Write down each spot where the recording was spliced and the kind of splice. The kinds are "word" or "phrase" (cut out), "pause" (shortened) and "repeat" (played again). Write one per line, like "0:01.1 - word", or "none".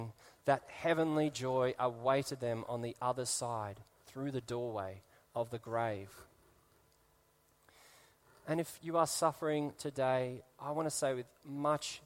none